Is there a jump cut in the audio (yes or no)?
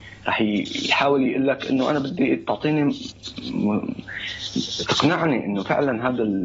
no